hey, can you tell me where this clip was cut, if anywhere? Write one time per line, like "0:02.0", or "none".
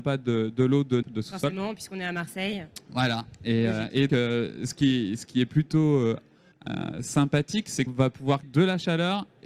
0:01.0
0:04.1
0:06.5
0:07.9
0:08.4